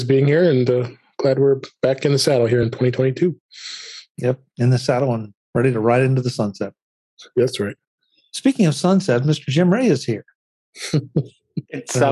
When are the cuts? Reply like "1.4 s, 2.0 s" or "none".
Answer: none